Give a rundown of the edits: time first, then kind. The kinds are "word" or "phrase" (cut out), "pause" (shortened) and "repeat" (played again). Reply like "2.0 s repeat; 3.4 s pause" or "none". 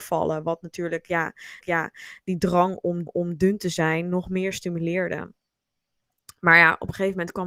1.6 s repeat; 3.1 s repeat